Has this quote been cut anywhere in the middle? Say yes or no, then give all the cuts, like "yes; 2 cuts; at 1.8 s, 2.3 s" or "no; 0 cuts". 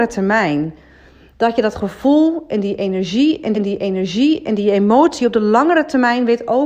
yes; 1 cut; at 3.5 s